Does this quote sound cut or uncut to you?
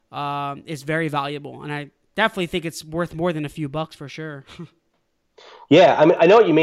uncut